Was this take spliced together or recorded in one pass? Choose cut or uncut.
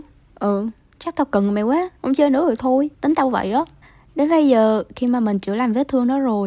cut